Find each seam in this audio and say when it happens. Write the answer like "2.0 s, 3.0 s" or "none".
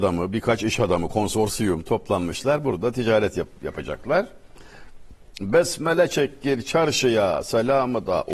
none